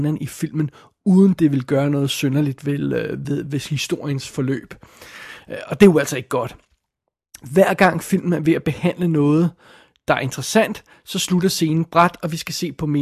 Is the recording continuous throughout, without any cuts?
yes; 0 cuts

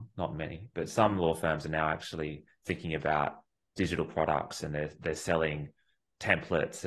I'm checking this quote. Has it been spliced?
no; 0 cuts

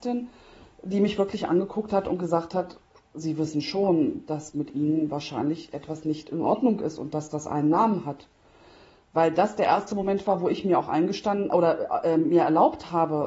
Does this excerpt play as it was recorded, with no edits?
yes; 0 cuts

